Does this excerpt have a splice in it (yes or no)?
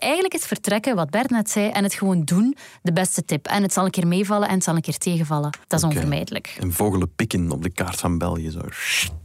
yes